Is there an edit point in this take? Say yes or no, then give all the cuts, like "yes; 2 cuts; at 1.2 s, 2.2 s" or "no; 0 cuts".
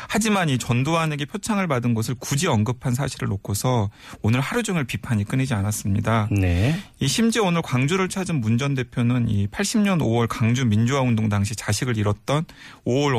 no; 0 cuts